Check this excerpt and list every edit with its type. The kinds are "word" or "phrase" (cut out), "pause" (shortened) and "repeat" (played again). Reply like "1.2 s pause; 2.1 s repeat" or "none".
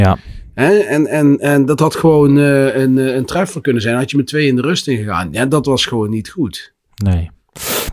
none